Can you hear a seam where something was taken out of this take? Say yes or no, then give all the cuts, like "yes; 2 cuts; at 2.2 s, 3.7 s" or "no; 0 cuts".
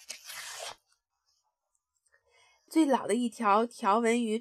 no; 0 cuts